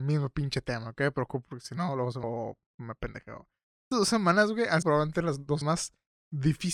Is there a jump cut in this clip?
yes; 5 cuts; at 1.5 s, 2.2 s, 3.9 s, 4.8 s, 5.6 s

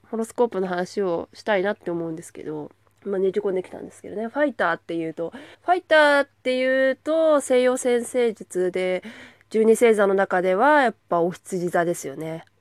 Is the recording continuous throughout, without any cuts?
no; 3 cuts; at 2.8 s, 5.5 s, 11.0 s

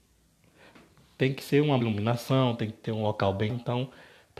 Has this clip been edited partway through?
yes; 2 cuts; at 1.8 s, 3.5 s

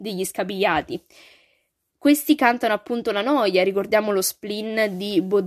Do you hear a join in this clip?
no; 0 cuts

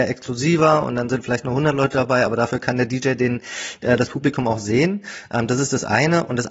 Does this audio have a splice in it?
no; 0 cuts

